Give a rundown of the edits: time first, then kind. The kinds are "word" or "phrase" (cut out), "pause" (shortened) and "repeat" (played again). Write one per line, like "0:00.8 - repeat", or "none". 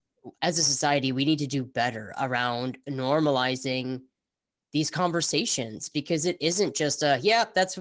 none